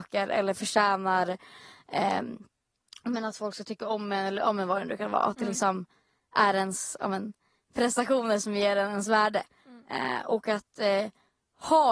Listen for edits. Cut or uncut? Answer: uncut